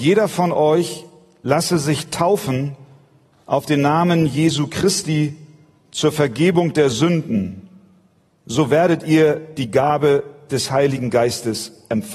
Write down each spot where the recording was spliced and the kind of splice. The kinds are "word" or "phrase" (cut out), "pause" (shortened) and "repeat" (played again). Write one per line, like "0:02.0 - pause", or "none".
none

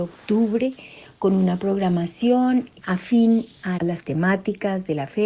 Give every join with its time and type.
0:02.8 - word
0:03.8 - word

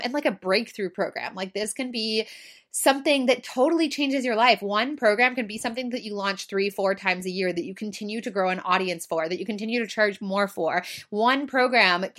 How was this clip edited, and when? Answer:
none

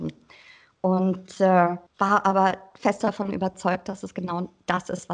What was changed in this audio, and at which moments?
0:01.9 - pause

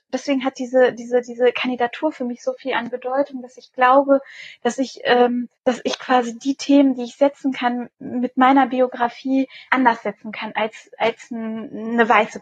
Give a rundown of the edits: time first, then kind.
0:05.6 - pause
0:09.7 - word

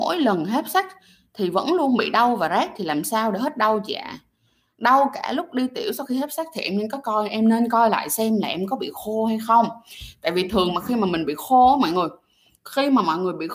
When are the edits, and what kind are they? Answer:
none

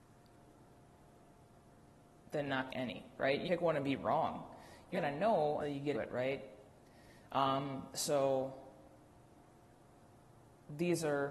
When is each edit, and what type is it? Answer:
0:02.7 - word
0:03.5 - word
0:04.9 - word
0:05.6 - word
0:05.9 - word

